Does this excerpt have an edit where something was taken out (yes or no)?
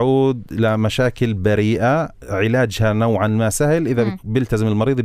no